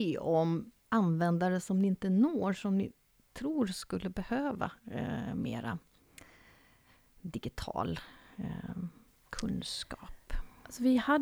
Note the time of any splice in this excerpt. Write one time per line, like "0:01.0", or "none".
none